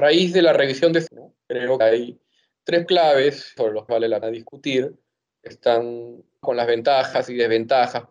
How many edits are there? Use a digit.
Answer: 7